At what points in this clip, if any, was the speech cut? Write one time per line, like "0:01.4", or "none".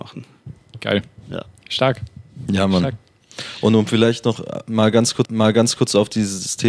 0:05.2